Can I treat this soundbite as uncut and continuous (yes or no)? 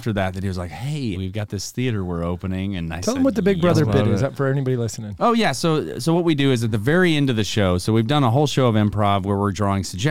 no